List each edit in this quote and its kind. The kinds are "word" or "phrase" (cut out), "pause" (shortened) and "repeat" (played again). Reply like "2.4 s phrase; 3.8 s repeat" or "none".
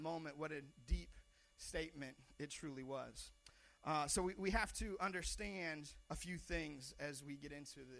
4.4 s word; 6.0 s pause